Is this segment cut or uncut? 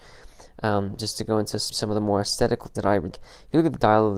cut